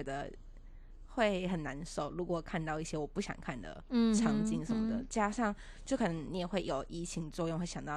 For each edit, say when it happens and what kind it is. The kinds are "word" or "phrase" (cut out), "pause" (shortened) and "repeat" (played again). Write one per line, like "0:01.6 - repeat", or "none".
none